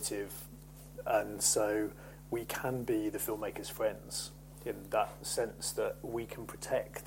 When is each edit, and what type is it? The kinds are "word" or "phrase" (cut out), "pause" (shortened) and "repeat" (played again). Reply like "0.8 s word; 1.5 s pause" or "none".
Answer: none